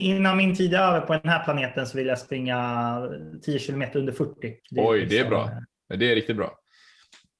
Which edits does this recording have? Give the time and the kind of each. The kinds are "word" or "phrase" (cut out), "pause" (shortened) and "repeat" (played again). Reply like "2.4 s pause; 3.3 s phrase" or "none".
4.6 s pause